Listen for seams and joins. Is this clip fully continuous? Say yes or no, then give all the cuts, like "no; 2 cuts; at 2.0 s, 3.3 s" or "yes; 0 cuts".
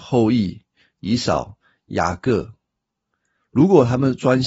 yes; 0 cuts